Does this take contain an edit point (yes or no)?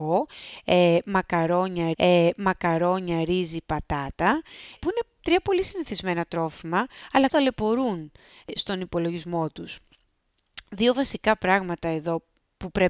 yes